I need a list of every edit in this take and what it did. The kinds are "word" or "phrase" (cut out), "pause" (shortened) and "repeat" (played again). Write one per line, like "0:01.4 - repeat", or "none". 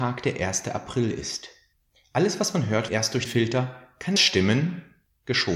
0:02.9 - word
0:03.3 - word
0:04.2 - word